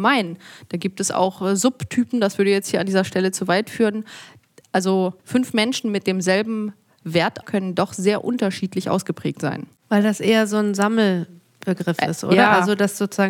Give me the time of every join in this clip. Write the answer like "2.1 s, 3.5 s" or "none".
5.2 s, 7.4 s, 9.8 s